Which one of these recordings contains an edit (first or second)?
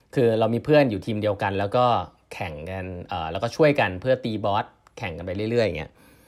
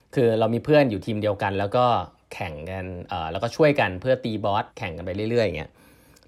second